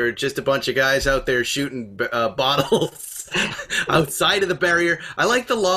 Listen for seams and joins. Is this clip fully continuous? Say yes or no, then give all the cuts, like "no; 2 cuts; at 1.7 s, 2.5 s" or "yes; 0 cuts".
yes; 0 cuts